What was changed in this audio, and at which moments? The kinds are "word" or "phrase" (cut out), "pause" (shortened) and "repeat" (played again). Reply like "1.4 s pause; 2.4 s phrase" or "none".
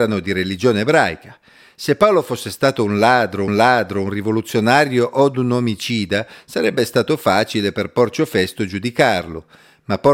3.5 s repeat

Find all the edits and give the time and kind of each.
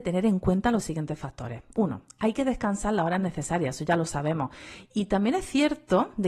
none

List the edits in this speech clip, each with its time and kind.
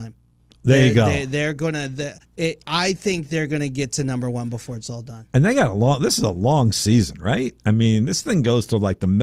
2.2 s pause

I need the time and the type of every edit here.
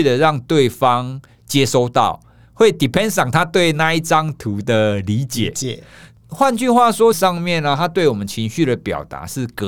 7.1 s phrase

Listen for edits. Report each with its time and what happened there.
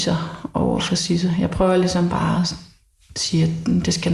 none

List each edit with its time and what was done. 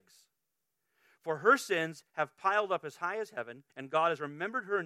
3.7 s pause

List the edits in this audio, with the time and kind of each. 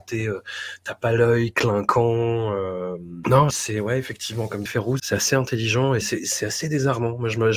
3.5 s word; 4.7 s word; 5.0 s word; 6.0 s word

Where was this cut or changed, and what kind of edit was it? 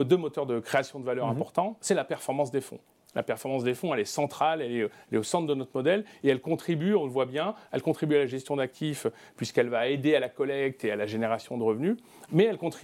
none

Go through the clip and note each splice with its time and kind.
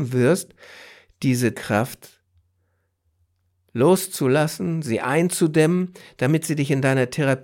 1.5 s word

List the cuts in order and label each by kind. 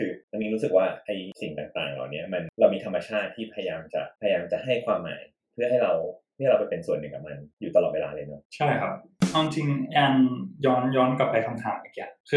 none

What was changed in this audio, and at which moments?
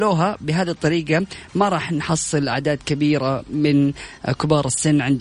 none

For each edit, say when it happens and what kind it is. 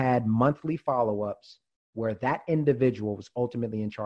none

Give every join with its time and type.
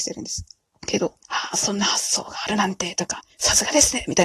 1.2 s pause

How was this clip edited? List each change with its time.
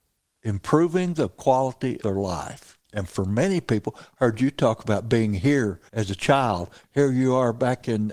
2.0 s word; 2.8 s pause; 5.9 s pause

